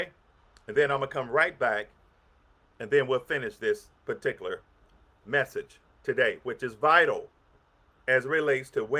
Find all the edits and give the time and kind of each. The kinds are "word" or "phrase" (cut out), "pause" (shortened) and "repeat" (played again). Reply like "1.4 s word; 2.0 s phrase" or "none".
none

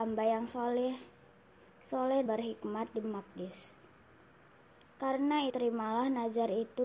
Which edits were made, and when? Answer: 2.3 s word; 3.0 s word; 5.5 s word

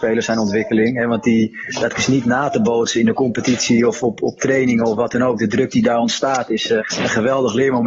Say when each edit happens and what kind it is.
6.8 s word

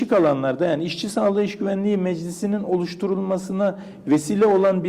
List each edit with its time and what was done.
none

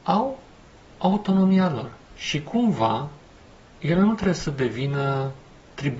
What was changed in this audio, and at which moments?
2.0 s pause

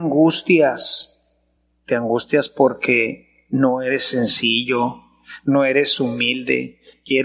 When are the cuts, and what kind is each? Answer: none

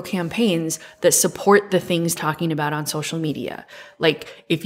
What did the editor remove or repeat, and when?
2.2 s phrase

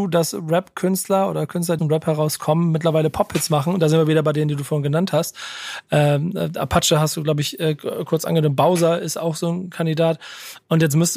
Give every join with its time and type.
1.8 s phrase

